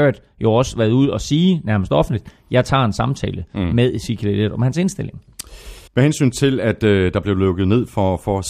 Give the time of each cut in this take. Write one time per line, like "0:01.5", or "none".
0:05.9